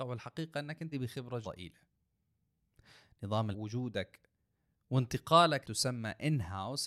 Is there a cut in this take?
yes; 4 cuts; at 0.9 s, 1.4 s, 3.5 s, 5.6 s

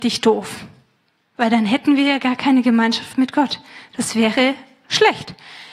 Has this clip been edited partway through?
no; 0 cuts

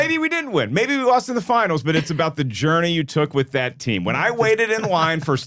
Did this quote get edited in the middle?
no; 0 cuts

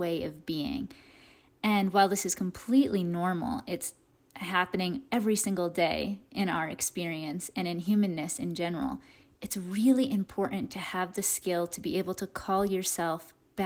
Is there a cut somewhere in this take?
no; 0 cuts

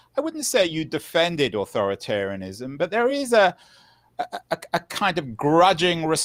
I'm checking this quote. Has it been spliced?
no; 0 cuts

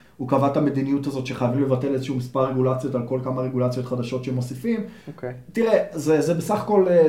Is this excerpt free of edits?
yes; 0 cuts

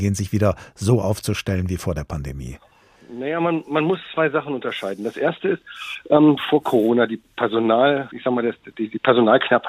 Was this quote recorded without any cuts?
no; 3 cuts; at 6.4 s, 8.1 s, 8.7 s

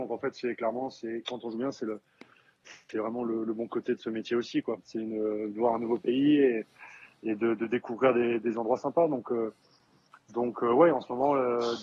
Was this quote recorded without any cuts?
yes; 0 cuts

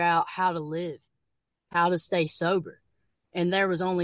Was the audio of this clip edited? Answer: no; 0 cuts

